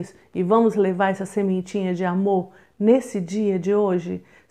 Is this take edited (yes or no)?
no